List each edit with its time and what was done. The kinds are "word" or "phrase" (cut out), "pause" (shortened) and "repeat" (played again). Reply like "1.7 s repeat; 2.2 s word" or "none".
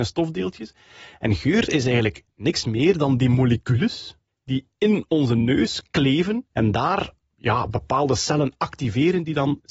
4.3 s pause; 6.5 s pause